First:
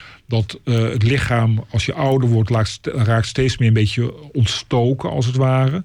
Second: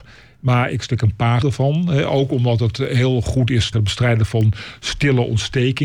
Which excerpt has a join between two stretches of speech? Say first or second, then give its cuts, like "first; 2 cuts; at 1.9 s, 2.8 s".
second; 2 cuts; at 1.4 s, 3.7 s